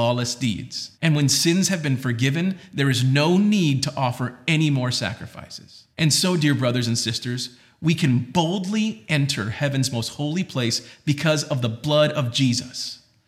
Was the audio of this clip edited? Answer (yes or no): yes